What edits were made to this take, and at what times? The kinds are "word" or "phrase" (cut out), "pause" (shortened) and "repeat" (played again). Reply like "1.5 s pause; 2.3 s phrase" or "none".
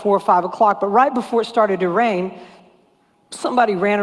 none